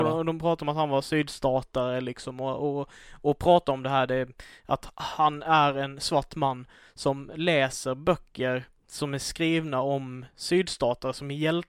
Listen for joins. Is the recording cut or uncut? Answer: uncut